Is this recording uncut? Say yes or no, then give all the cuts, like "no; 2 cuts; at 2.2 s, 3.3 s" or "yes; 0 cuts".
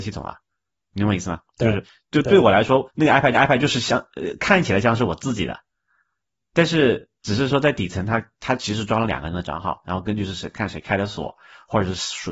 no; 2 cuts; at 2.9 s, 3.3 s